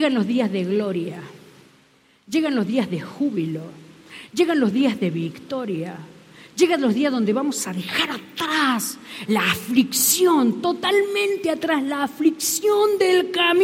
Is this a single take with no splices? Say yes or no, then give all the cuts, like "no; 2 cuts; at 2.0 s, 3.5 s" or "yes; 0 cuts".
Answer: no; 1 cut; at 9.3 s